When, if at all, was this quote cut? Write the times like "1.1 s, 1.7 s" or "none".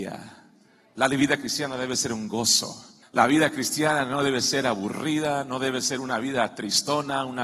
3.0 s